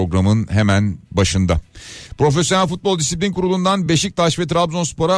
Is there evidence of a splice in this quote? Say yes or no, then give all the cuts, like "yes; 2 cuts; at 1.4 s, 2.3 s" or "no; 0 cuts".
no; 0 cuts